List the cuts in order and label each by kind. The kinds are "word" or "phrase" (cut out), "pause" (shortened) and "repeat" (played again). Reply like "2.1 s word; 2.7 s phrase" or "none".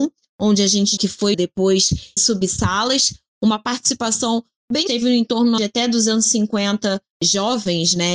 1.0 s phrase; 1.3 s word; 2.2 s word; 4.9 s phrase; 5.6 s phrase